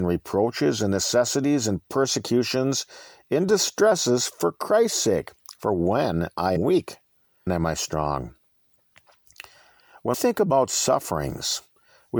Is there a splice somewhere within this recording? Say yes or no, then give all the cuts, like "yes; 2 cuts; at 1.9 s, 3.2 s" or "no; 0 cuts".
yes; 3 cuts; at 6.6 s, 7.5 s, 10.1 s